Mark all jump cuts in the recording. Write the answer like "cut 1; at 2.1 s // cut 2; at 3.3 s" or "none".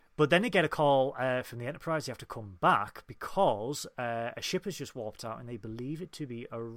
none